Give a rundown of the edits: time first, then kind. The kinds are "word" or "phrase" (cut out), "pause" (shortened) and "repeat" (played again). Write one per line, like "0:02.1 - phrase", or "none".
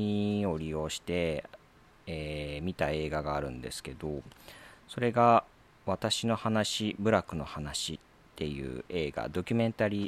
0:05.5 - pause